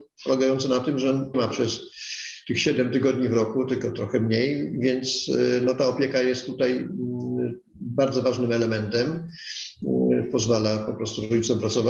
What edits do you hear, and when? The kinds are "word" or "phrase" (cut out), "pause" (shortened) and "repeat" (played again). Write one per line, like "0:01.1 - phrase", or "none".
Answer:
0:01.3 - phrase

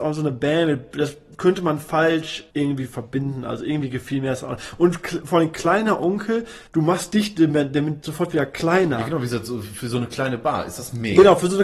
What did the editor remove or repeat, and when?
0:02.5 - pause
0:06.7 - pause

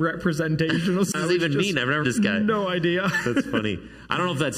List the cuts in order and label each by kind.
0:02.0 - word

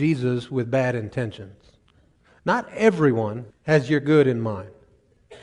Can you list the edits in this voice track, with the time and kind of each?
0:02.2 - pause
0:03.5 - pause

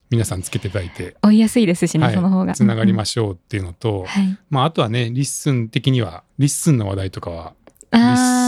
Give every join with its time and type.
0:06.3 - pause

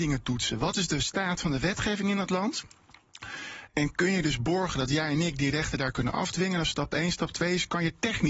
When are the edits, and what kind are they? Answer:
none

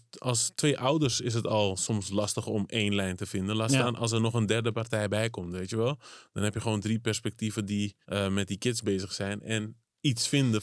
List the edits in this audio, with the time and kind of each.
0:08.0 - pause

